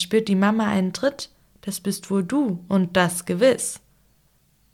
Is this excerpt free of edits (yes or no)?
yes